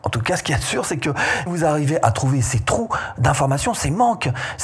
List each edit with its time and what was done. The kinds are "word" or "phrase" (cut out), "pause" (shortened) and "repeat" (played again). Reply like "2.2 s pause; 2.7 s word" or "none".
1.5 s word

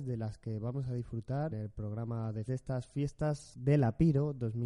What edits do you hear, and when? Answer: 1.5 s word; 2.5 s word

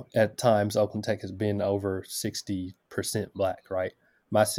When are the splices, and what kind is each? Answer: none

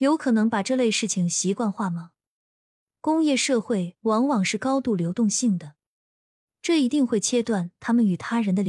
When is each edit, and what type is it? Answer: none

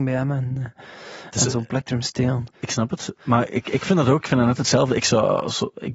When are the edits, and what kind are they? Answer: 2.5 s pause

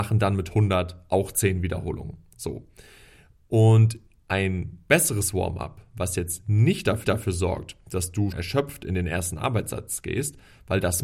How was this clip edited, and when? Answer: 7.0 s repeat; 8.3 s word

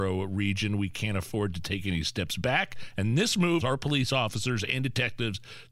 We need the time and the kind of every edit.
3.6 s word

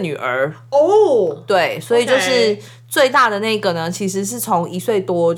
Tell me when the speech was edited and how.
none

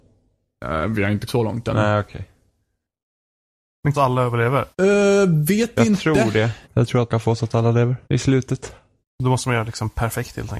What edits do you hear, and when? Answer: 1.3 s word; 3.9 s phrase; 4.7 s pause; 6.6 s pause; 7.1 s word; 8.0 s pause; 9.0 s pause

